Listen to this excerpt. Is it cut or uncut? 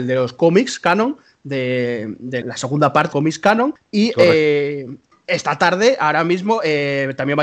cut